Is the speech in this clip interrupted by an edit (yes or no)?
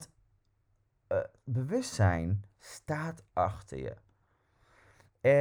no